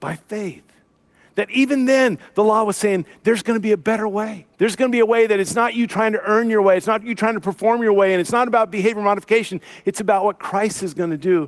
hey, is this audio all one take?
no; 1 cut; at 4.5 s

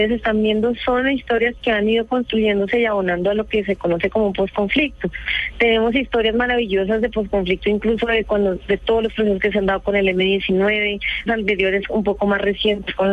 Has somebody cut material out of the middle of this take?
yes; 1 cut; at 11.3 s

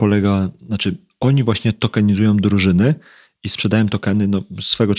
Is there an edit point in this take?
no; 0 cuts

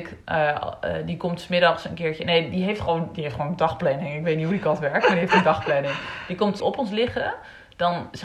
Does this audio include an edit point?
yes; 1 cut; at 6.6 s

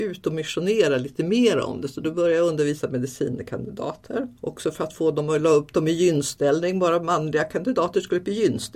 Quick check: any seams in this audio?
yes; 1 cut; at 4.4 s

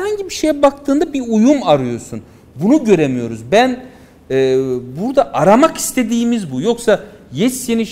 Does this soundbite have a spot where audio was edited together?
no; 0 cuts

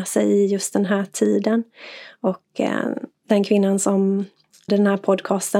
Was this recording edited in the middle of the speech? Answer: yes; 2 cuts; at 3.1 s, 4.7 s

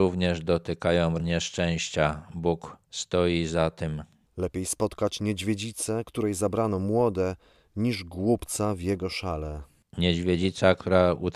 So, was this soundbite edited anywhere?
yes; 1 cut; at 1.2 s

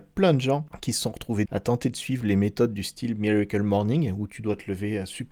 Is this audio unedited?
no; 1 cut; at 1.5 s

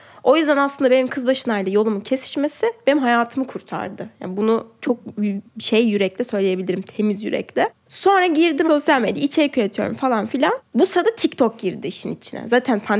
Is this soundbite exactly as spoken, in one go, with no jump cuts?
no; 1 cut; at 5.5 s

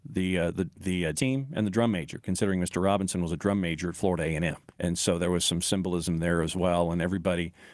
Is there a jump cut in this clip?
yes; 2 cuts; at 1.1 s, 4.7 s

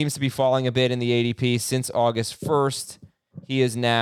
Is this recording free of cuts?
yes; 0 cuts

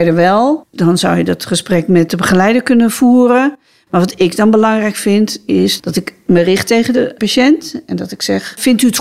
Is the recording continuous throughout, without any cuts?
yes; 0 cuts

